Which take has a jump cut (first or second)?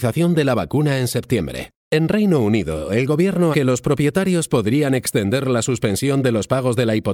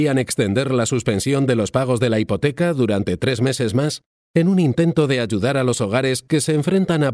first